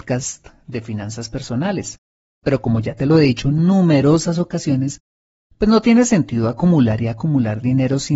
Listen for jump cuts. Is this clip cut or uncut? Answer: uncut